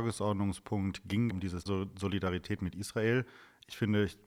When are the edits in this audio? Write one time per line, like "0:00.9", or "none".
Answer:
0:01.3
0:01.7